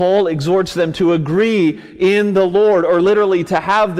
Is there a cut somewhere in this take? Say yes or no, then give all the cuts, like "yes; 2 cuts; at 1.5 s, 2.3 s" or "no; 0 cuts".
no; 0 cuts